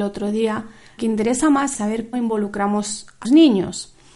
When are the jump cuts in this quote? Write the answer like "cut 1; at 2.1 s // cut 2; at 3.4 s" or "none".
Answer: cut 1; at 1.0 s // cut 2; at 1.7 s // cut 3; at 2.1 s // cut 4; at 3.2 s